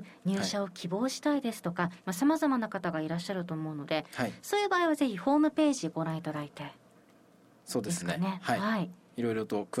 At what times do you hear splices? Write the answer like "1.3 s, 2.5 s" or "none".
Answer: none

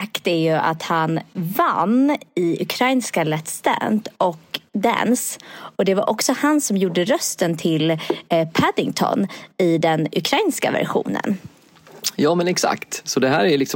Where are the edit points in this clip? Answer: none

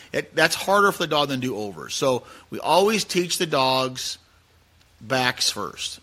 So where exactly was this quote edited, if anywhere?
none

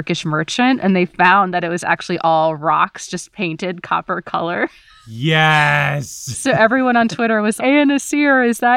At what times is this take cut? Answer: 7.6 s

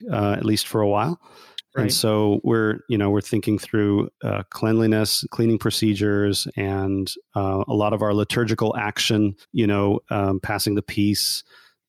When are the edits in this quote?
4.1 s, 9.4 s

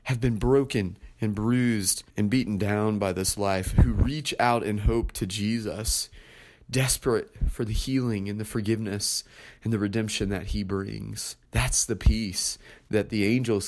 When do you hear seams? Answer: 2.1 s, 11.5 s

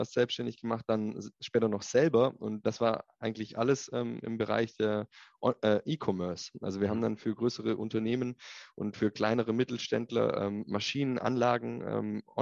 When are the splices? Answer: 2.6 s

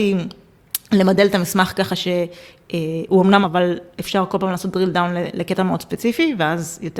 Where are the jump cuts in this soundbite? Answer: 3.4 s

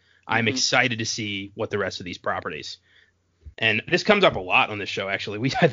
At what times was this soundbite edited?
1.7 s

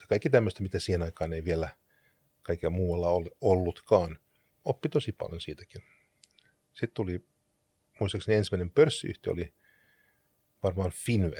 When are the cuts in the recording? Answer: none

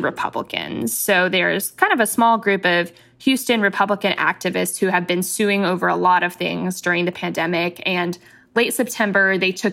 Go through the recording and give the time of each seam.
none

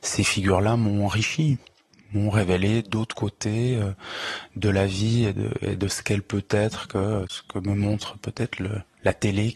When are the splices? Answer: 5.3 s

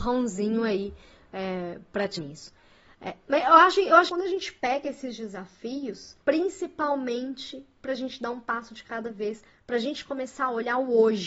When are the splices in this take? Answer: 2.2 s, 4.1 s, 6.2 s

